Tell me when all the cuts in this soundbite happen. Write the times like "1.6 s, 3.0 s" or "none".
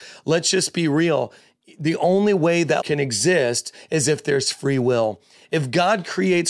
2.8 s